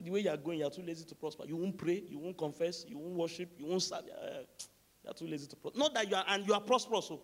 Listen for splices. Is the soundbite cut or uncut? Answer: uncut